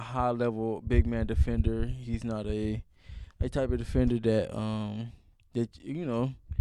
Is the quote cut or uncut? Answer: uncut